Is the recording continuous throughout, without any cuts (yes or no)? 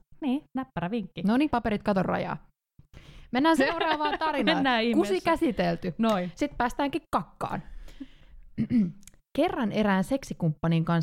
no